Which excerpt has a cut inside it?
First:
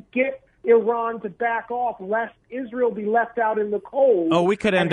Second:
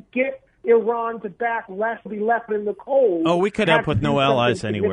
second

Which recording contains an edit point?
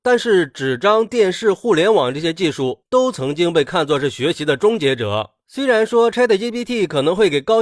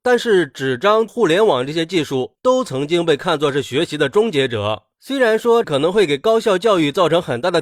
second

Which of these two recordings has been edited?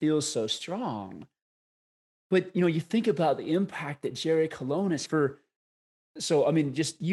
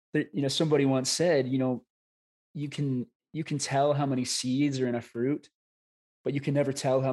first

